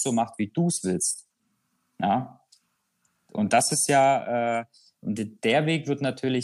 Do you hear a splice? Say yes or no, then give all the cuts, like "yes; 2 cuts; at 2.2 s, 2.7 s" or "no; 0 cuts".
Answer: no; 0 cuts